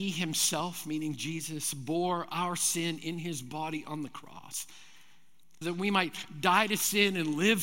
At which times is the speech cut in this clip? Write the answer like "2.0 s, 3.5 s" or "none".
5.6 s